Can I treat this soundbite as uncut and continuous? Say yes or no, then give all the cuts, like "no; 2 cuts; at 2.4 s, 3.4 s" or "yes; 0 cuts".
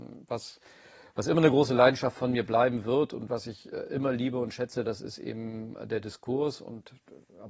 yes; 0 cuts